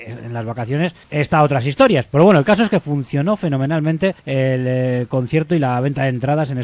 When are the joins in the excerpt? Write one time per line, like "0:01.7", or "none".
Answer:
0:01.0
0:04.2